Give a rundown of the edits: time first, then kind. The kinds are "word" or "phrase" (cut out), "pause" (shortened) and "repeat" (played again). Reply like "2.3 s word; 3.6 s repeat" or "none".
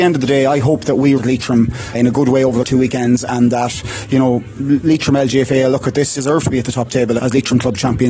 1.2 s word; 1.9 s word; 2.6 s word; 6.1 s phrase; 7.2 s word